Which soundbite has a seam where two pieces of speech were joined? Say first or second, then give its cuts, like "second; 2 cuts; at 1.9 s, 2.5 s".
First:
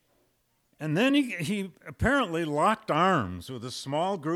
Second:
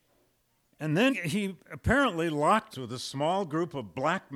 second; 2 cuts; at 1.1 s, 2.7 s